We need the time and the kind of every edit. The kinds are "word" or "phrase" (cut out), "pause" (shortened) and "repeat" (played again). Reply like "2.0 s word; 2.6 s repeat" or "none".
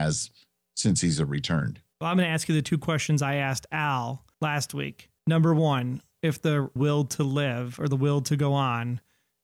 1.9 s pause; 4.3 s pause; 5.2 s pause; 6.8 s phrase